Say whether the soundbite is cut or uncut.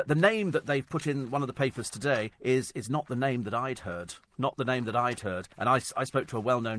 cut